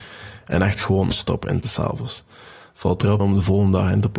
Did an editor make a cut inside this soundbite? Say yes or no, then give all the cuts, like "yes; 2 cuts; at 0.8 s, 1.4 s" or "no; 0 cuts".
yes; 3 cuts; at 1.1 s, 1.6 s, 3.2 s